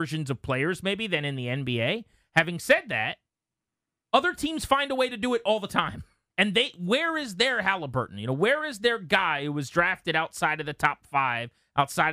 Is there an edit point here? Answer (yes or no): yes